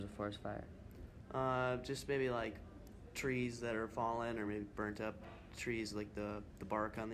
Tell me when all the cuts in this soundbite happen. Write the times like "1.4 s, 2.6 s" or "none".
none